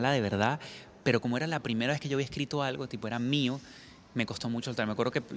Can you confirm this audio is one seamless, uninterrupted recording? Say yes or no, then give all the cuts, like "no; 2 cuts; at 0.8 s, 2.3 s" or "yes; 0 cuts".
yes; 0 cuts